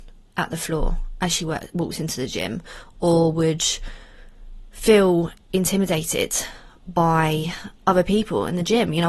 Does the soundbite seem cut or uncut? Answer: cut